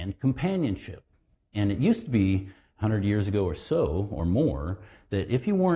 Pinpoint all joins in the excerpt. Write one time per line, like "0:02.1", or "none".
none